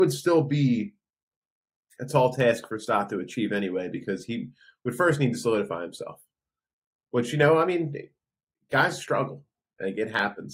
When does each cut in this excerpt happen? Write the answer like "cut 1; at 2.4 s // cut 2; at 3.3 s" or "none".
none

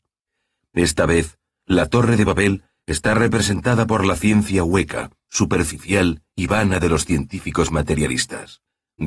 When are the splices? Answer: none

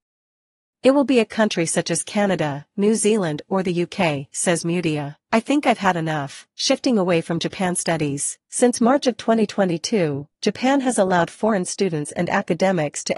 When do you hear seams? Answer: cut 1; at 5.2 s // cut 2; at 6.5 s // cut 3; at 8.4 s

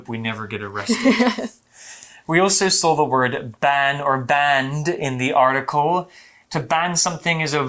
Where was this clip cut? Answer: none

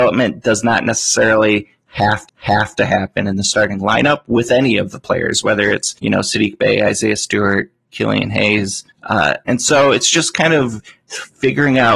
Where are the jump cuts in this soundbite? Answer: cut 1; at 2.3 s // cut 2; at 6.0 s // cut 3; at 8.9 s

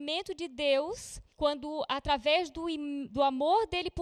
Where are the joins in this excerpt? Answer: cut 1; at 1.3 s

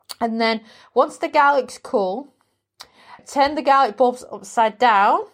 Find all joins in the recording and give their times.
cut 1; at 3.2 s

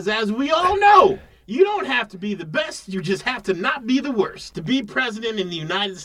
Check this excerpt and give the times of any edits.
none

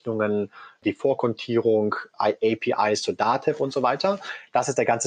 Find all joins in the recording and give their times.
none

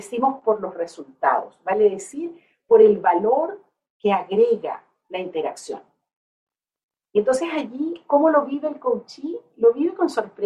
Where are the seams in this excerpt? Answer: none

